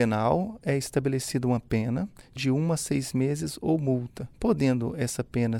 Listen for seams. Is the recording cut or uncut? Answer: cut